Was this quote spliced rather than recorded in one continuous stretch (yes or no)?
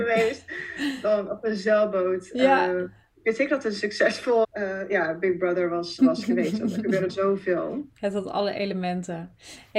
yes